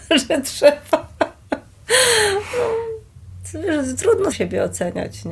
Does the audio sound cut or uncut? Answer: cut